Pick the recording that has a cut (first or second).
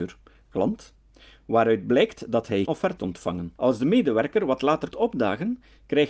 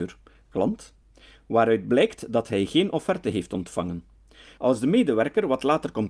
first